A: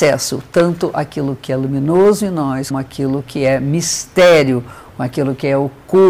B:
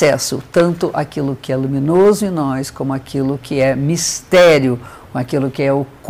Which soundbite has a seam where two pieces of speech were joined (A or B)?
A